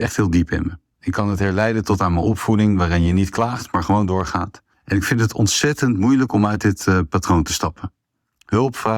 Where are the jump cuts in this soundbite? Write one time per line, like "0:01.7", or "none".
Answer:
0:04.7